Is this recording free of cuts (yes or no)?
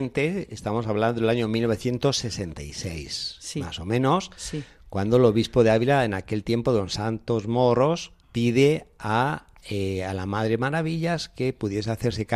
no